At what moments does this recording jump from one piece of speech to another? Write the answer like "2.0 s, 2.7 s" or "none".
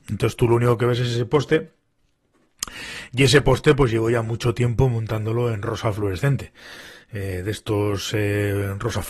none